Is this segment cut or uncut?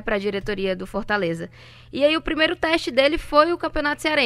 uncut